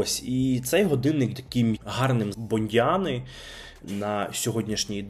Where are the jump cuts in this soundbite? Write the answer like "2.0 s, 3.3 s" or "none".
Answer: 1.3 s, 1.8 s, 2.3 s